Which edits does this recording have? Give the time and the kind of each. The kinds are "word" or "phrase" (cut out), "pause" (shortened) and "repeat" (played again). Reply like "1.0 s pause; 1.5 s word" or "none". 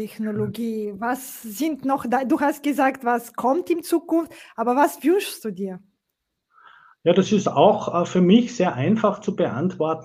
none